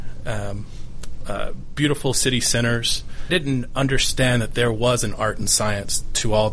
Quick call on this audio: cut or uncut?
cut